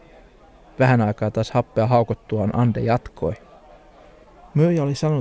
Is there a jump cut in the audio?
no; 0 cuts

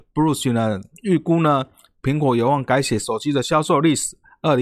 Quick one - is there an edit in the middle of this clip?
no; 0 cuts

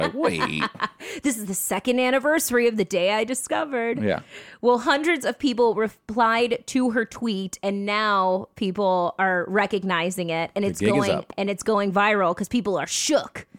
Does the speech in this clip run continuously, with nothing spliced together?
yes; 0 cuts

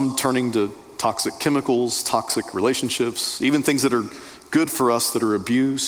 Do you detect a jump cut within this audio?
no; 0 cuts

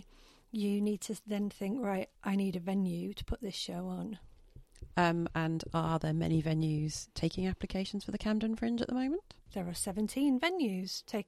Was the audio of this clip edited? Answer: yes; 1 cut; at 2.2 s

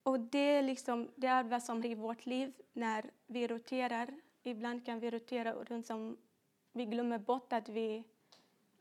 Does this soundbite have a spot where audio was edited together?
yes; 2 cuts; at 1.8 s, 5.8 s

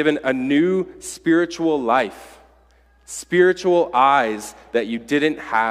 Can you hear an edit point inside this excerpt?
no; 0 cuts

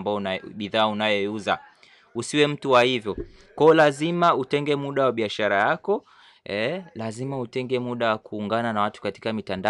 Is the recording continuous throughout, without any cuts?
yes; 0 cuts

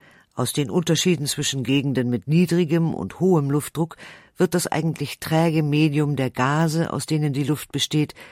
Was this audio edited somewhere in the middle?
no; 0 cuts

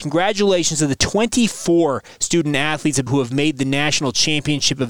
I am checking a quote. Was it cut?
yes; 1 cut; at 3.1 s

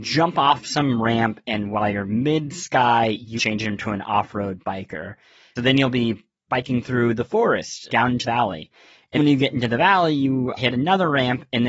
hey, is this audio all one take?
no; 6 cuts; at 3.4 s, 5.6 s, 7.9 s, 8.2 s, 9.2 s, 10.6 s

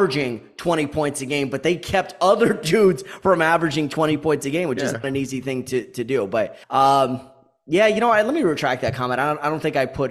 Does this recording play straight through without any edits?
no; 1 cut; at 6.6 s

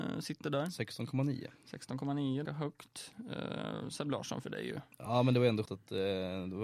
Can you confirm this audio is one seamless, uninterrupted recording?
no; 3 cuts; at 2.4 s, 4.4 s, 5.6 s

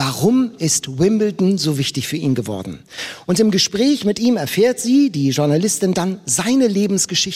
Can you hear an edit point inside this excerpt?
no; 0 cuts

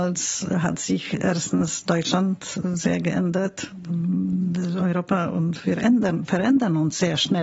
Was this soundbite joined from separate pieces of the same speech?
no; 0 cuts

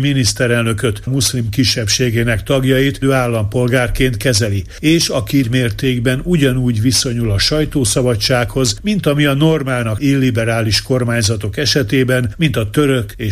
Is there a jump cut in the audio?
yes; 4 cuts; at 1.1 s, 3.0 s, 5.4 s, 10.0 s

